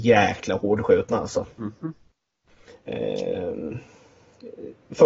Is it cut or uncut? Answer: cut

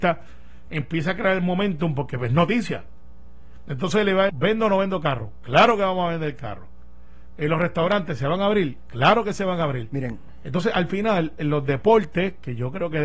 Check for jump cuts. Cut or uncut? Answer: cut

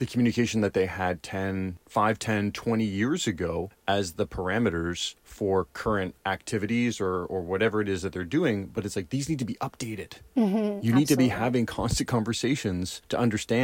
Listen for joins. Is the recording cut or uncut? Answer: cut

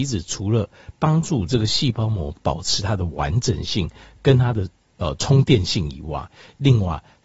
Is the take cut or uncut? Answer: uncut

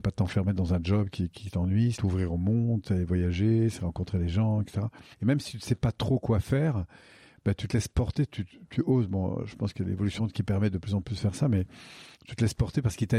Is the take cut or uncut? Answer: cut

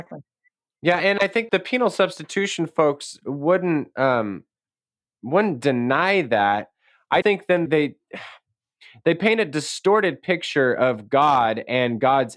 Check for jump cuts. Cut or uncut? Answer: cut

